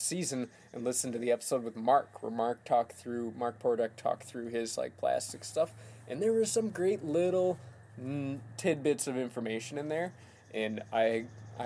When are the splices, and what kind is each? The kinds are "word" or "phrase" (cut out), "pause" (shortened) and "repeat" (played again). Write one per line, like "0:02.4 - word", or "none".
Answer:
none